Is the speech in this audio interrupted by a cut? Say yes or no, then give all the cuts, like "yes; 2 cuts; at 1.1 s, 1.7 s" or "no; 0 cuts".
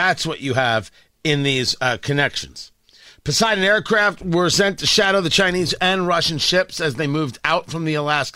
no; 0 cuts